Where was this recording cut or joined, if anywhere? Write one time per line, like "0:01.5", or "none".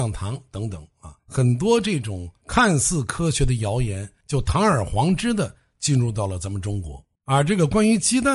0:01.2
0:07.2